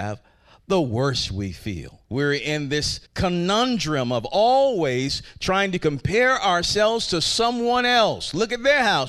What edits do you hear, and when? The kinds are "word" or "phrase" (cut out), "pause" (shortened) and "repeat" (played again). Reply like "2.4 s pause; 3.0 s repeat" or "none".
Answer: 2.0 s pause; 3.1 s pause